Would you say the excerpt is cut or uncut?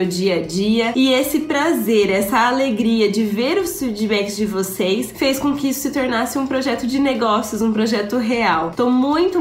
uncut